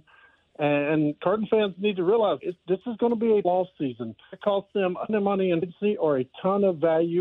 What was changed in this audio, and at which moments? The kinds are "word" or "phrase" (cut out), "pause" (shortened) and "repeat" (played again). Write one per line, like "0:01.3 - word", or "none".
0:02.4 - word
0:03.4 - word
0:04.3 - word
0:05.1 - word
0:05.6 - word